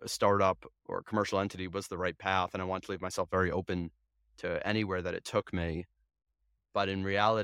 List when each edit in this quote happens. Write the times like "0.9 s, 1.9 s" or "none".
none

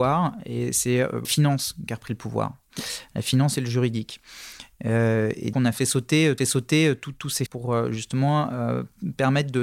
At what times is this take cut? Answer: 1.2 s, 5.5 s, 6.4 s, 7.5 s

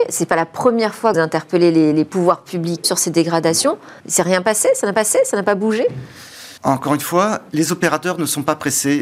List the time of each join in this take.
1.1 s, 2.8 s, 4.0 s, 4.9 s, 6.6 s, 7.5 s

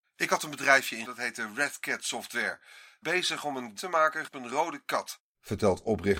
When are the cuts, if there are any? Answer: 1.0 s, 3.0 s, 3.8 s, 4.3 s

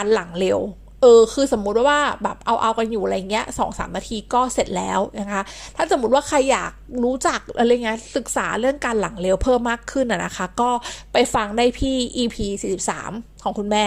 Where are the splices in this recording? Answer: none

